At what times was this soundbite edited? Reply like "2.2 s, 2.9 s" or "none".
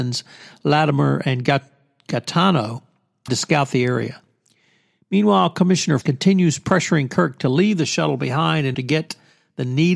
3.3 s, 6.0 s, 8.7 s

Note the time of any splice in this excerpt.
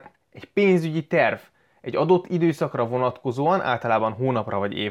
none

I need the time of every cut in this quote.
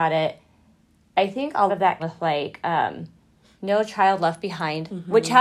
1.7 s, 2.0 s

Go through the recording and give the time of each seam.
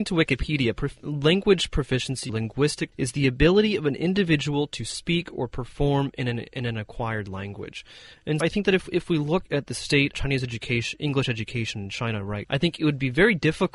2.3 s, 2.9 s, 8.4 s, 10.1 s, 12.4 s

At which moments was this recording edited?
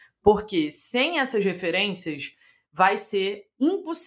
none

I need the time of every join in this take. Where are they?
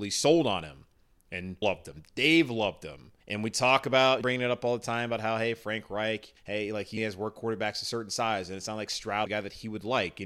1.6 s, 3.2 s, 4.2 s, 6.4 s, 7.0 s, 9.3 s

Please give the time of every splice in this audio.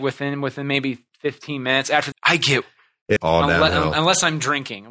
2.1 s, 2.6 s, 3.2 s

